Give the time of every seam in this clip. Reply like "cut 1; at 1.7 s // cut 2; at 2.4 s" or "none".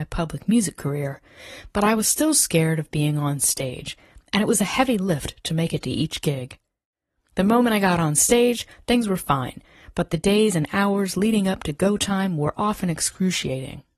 none